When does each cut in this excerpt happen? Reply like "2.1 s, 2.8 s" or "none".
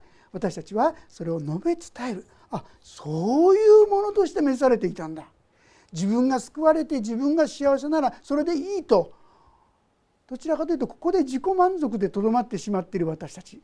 none